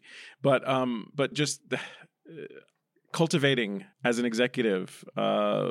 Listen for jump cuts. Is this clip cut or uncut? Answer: cut